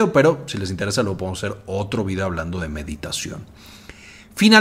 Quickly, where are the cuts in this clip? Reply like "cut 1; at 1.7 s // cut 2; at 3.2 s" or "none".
none